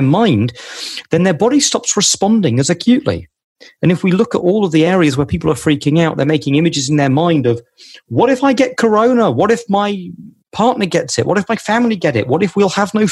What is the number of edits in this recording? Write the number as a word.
zero